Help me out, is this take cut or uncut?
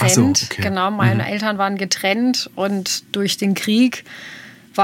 uncut